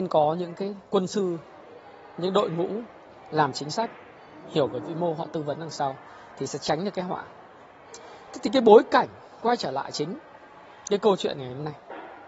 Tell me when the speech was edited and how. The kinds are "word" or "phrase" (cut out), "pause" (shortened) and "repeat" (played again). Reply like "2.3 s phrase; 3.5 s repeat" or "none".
none